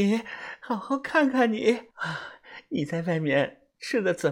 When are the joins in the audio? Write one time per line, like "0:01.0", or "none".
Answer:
0:01.9